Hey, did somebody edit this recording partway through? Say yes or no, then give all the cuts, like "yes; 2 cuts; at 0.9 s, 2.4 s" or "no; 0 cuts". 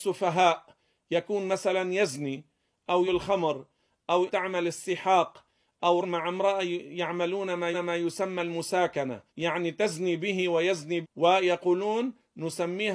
yes; 6 cuts; at 3.1 s, 4.3 s, 6.0 s, 7.7 s, 9.3 s, 11.0 s